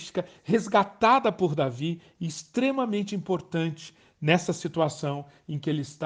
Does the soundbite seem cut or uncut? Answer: uncut